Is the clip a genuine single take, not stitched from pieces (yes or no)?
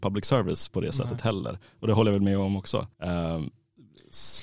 no